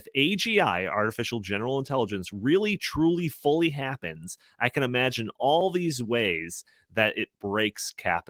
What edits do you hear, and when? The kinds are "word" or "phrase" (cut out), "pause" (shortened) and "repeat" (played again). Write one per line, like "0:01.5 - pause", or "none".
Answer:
none